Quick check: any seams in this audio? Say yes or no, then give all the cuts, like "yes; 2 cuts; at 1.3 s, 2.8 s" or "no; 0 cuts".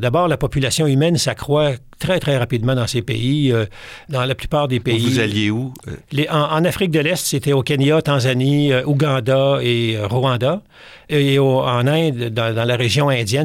no; 0 cuts